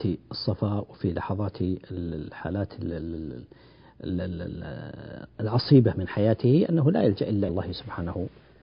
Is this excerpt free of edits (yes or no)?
no